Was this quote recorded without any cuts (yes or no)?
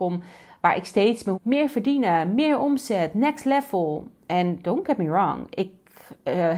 no